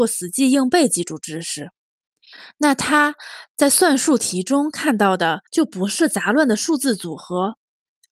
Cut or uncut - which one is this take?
cut